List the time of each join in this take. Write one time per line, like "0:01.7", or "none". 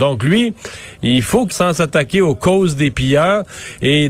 0:01.5